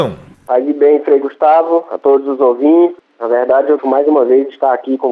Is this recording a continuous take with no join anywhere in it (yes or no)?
no